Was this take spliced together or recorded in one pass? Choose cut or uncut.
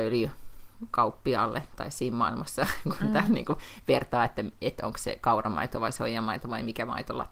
uncut